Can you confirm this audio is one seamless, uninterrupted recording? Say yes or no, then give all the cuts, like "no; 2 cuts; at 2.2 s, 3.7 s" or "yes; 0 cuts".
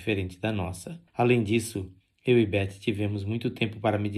no; 1 cut; at 1.1 s